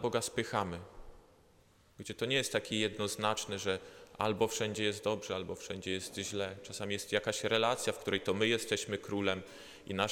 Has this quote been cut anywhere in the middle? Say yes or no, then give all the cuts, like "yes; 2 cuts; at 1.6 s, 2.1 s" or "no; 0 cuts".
no; 0 cuts